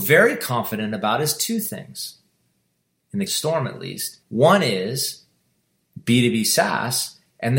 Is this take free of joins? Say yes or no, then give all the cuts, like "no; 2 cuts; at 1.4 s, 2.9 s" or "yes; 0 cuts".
no; 2 cuts; at 3.3 s, 4.2 s